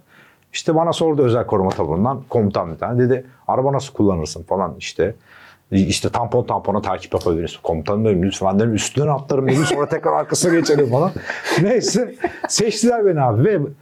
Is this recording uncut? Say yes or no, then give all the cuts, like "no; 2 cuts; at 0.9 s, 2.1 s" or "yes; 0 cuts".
yes; 0 cuts